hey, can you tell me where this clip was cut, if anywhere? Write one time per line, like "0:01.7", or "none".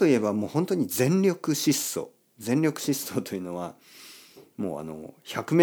none